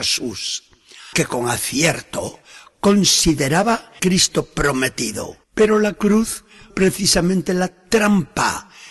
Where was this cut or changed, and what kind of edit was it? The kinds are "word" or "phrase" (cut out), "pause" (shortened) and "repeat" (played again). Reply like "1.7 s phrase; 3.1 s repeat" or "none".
1.1 s word; 4.0 s word; 5.4 s pause; 6.7 s word